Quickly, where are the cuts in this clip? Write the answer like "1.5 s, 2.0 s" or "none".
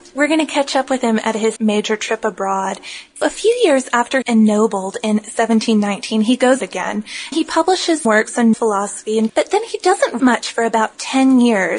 1.6 s, 3.2 s, 4.2 s, 6.6 s, 7.3 s, 8.0 s, 8.5 s, 9.3 s, 10.2 s